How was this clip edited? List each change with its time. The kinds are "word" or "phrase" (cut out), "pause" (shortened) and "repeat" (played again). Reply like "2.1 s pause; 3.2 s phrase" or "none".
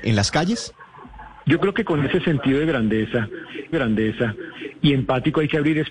3.7 s repeat